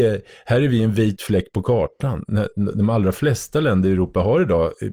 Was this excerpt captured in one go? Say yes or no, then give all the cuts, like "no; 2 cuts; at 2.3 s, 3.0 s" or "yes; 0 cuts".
yes; 0 cuts